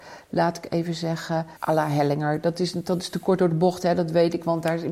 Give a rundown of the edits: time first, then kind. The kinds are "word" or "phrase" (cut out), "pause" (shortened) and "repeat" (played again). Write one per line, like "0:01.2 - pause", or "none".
0:01.6 - pause